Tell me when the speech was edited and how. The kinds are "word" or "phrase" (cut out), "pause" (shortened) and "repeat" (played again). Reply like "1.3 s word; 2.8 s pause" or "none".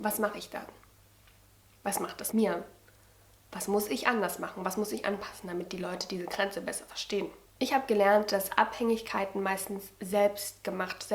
2.3 s word